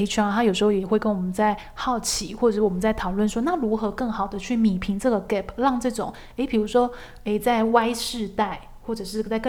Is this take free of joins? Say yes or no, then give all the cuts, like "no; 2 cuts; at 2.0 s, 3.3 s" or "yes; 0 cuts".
yes; 0 cuts